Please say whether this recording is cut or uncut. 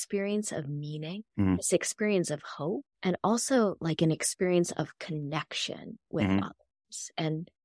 cut